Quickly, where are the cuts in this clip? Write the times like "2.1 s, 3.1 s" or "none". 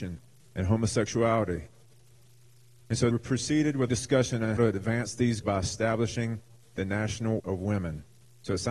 3.1 s, 3.9 s, 4.6 s, 5.4 s, 7.4 s